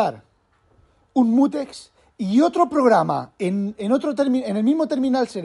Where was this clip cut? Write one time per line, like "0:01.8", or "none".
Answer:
none